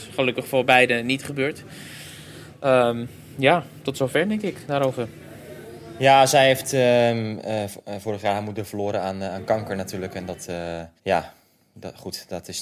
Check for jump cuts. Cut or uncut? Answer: cut